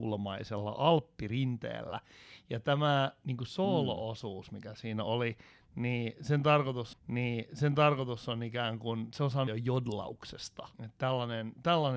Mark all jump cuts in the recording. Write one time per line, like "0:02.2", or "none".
0:06.9
0:09.5
0:10.7